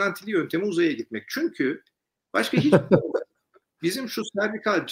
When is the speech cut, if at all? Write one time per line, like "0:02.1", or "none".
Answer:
none